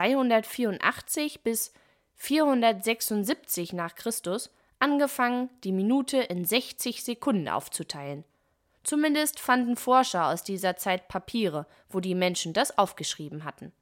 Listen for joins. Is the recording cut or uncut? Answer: uncut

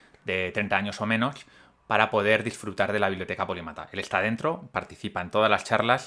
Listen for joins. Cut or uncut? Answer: uncut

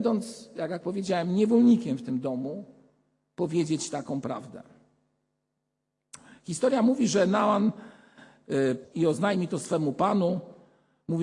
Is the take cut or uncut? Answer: cut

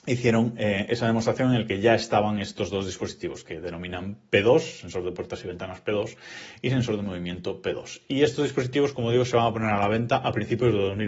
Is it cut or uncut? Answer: uncut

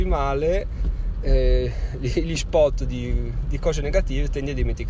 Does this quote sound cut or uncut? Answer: uncut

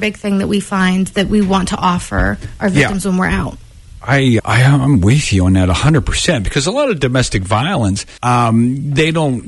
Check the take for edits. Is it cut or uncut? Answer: cut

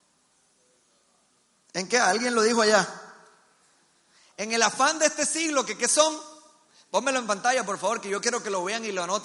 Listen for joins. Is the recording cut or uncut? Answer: uncut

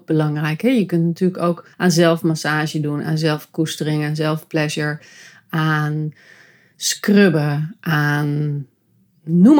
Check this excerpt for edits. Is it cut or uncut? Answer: cut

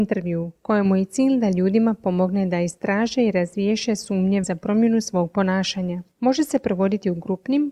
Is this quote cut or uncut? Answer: cut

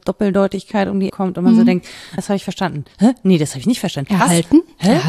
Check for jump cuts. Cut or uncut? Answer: cut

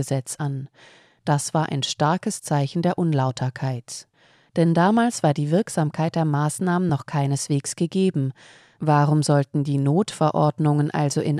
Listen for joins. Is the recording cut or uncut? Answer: uncut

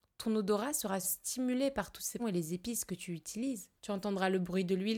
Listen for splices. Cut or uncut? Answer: cut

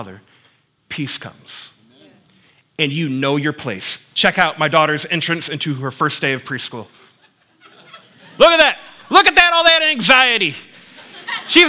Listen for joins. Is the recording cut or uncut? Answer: uncut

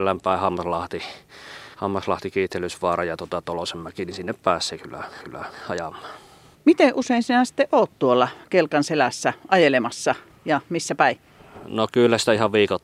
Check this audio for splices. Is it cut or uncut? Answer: cut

